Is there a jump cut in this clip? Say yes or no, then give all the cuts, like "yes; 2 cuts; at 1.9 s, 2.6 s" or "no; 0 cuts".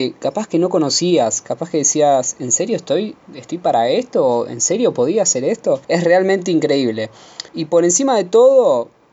yes; 3 cuts; at 3.2 s, 5.8 s, 7.5 s